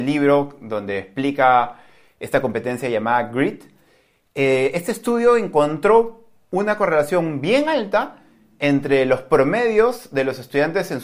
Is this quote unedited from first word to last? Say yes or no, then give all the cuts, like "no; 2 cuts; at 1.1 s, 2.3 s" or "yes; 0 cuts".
yes; 0 cuts